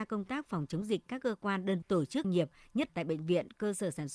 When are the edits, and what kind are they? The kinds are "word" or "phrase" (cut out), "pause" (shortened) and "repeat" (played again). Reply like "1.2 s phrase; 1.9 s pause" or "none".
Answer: 1.1 s word; 1.8 s word; 2.2 s word; 2.9 s word